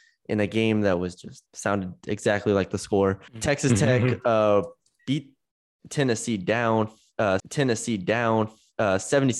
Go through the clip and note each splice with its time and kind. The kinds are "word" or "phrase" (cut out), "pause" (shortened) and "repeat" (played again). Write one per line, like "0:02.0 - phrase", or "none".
0:01.5 - pause
0:03.3 - pause
0:07.4 - repeat